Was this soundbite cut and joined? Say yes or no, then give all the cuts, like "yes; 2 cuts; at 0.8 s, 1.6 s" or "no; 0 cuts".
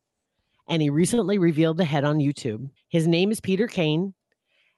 yes; 1 cut; at 2.8 s